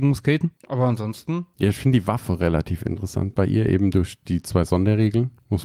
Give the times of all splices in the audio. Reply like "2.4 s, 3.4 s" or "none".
none